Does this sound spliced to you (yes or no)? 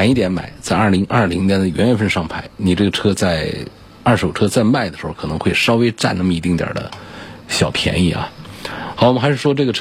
no